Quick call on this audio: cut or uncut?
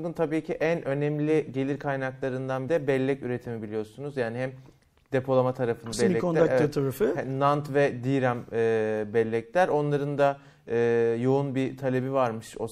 cut